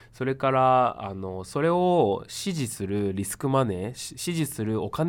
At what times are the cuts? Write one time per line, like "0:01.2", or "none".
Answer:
none